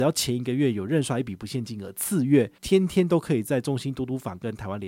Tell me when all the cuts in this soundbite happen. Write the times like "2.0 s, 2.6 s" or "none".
2.6 s